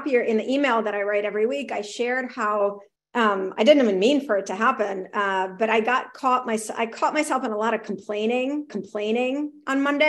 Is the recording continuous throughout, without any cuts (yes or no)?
no